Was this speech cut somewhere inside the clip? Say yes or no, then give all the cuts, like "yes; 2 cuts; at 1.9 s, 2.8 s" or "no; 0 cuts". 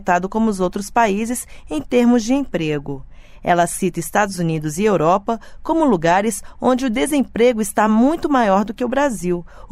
no; 0 cuts